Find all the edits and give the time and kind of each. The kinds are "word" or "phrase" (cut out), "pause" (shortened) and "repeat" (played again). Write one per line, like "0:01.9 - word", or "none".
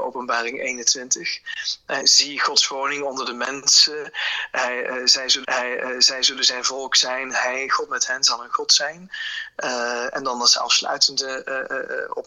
0:02.0 - word
0:05.4 - repeat